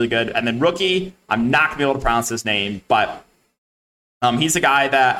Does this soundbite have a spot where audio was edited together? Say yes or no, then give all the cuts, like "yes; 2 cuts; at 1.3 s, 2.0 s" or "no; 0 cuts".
no; 0 cuts